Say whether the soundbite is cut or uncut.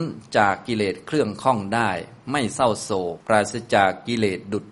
cut